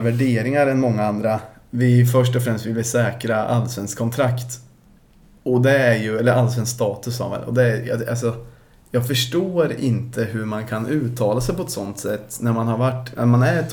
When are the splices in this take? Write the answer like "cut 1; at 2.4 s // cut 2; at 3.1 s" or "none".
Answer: none